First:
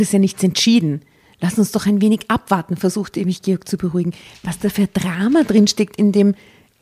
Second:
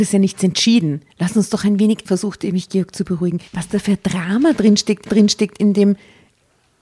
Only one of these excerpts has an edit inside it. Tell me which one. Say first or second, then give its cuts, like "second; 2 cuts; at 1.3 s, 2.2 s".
second; 4 cuts; at 1.1 s, 2.1 s, 3.5 s, 5.1 s